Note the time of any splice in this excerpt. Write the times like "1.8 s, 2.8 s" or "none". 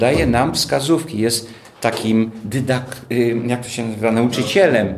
none